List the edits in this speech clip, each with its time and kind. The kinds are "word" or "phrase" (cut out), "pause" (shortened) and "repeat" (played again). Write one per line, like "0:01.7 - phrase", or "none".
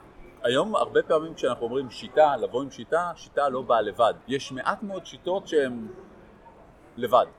0:04.2 - pause